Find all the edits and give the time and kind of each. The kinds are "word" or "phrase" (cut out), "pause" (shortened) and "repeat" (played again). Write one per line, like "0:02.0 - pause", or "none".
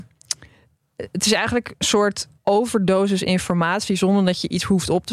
0:02.4 - pause